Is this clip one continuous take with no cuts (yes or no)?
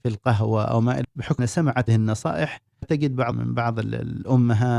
no